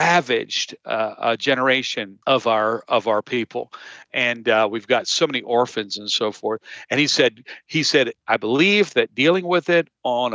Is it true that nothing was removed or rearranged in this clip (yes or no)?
no